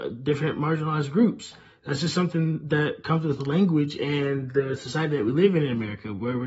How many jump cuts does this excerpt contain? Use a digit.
0